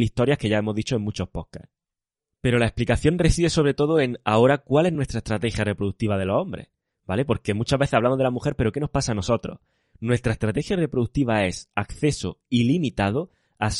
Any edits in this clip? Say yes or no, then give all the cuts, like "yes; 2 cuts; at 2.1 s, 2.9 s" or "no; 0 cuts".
no; 0 cuts